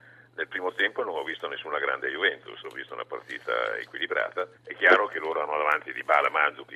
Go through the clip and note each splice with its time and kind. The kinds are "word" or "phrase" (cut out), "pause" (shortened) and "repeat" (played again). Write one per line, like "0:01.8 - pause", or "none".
0:04.6 - pause